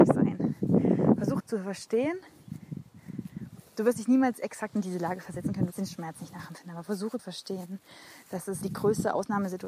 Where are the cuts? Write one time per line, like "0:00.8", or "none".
0:01.4
0:05.7
0:07.2
0:08.6